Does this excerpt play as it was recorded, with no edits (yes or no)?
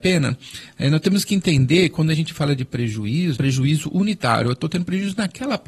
no